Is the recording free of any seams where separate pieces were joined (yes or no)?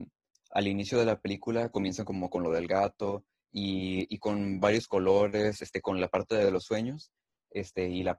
yes